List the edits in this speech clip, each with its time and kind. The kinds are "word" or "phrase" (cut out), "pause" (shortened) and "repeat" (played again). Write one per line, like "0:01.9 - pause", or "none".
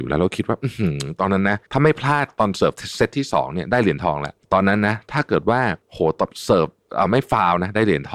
0:01.6 - pause
0:04.4 - pause
0:05.8 - pause